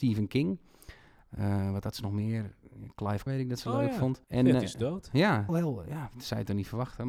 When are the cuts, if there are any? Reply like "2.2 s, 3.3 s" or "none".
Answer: 3.3 s, 4.2 s, 5.5 s